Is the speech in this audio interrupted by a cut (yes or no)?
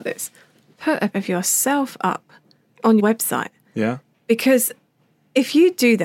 yes